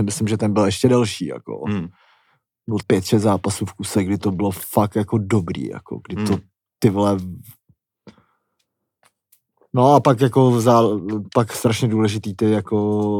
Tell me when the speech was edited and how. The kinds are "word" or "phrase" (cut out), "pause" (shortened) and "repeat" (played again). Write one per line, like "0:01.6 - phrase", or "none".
0:02.8 - word